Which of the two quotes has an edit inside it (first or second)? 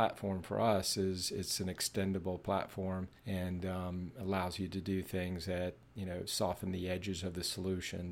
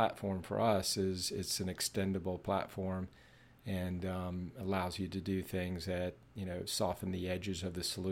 first